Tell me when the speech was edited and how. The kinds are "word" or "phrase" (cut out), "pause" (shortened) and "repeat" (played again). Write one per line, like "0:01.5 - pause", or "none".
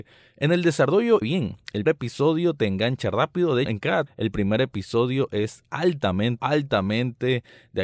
0:01.2 - word
0:01.9 - word
0:03.7 - word
0:04.1 - word
0:06.4 - word